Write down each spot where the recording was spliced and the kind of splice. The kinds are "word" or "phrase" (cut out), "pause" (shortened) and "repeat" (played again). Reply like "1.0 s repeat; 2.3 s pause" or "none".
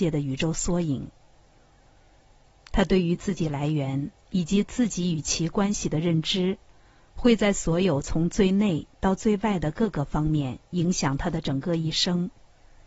none